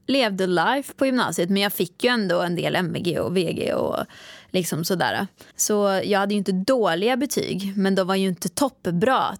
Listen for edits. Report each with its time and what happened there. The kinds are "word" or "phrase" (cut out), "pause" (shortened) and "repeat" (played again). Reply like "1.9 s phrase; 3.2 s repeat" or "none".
5.5 s pause